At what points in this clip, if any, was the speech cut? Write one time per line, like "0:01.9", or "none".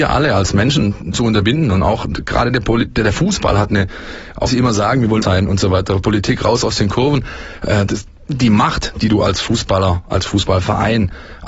0:01.1
0:04.5
0:05.2